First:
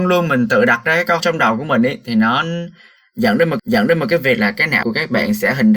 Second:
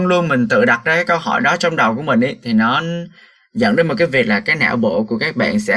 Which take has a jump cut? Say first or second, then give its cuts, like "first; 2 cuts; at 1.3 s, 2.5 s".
first; 3 cuts; at 1.2 s, 3.6 s, 4.8 s